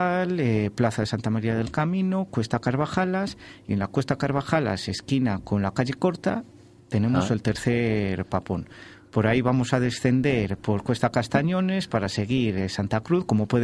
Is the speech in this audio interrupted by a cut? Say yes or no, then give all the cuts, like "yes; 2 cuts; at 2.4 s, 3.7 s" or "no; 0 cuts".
no; 0 cuts